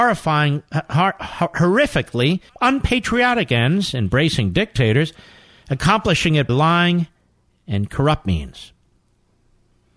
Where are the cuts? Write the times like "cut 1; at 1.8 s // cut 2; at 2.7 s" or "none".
cut 1; at 2.5 s // cut 2; at 6.5 s